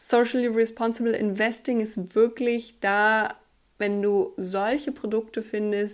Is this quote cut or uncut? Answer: uncut